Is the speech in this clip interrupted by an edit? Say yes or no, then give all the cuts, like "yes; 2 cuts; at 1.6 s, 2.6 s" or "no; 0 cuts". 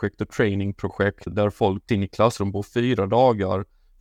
yes; 2 cuts; at 1.3 s, 1.9 s